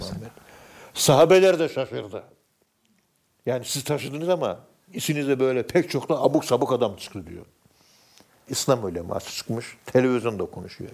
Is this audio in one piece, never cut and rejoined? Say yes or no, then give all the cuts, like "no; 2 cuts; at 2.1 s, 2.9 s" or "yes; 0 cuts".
yes; 0 cuts